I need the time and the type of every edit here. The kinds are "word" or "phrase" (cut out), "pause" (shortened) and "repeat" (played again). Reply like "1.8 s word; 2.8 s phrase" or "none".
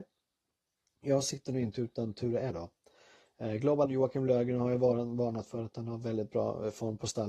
2.5 s word; 3.9 s word